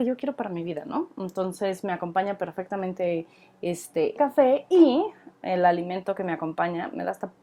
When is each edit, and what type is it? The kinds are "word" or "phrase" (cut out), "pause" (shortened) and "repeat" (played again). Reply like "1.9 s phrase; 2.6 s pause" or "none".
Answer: 4.2 s word